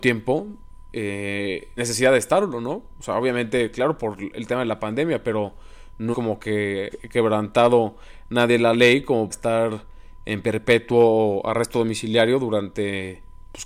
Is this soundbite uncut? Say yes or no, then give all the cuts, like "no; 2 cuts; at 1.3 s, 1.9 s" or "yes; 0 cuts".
no; 4 cuts; at 1.8 s, 6.1 s, 6.9 s, 9.3 s